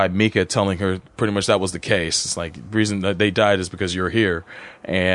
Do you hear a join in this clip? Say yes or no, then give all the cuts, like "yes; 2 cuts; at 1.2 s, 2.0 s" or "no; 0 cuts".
yes; 1 cut; at 1.1 s